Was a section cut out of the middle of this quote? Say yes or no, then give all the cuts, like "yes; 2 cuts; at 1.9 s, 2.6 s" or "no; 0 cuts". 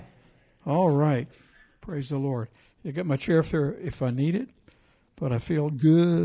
no; 0 cuts